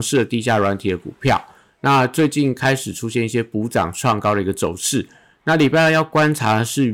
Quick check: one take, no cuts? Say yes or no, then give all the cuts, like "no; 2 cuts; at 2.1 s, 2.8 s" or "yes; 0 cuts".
yes; 0 cuts